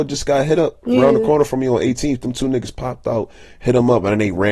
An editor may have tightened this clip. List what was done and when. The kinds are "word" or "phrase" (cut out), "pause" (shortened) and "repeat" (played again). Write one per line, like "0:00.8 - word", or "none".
none